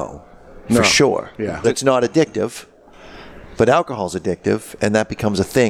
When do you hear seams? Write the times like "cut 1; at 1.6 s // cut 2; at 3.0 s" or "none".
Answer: cut 1; at 1.6 s